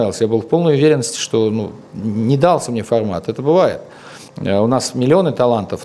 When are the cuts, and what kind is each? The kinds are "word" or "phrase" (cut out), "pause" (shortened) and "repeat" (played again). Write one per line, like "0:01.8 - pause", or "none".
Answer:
0:04.3 - pause